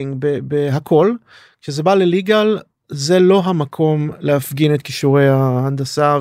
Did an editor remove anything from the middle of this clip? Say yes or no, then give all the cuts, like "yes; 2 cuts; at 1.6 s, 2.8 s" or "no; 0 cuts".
no; 0 cuts